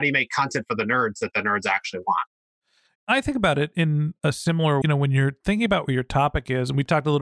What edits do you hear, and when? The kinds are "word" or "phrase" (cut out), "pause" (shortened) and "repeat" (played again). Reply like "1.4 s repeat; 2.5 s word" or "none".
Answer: 4.8 s phrase